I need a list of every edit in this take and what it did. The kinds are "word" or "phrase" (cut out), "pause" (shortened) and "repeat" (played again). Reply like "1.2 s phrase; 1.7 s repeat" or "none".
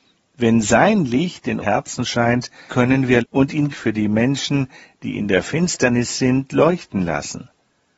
1.6 s word; 2.7 s word; 3.2 s word; 3.7 s word